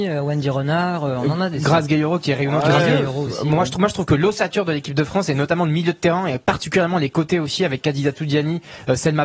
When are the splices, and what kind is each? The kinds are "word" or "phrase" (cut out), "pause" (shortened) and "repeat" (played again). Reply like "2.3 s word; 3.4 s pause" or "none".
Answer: none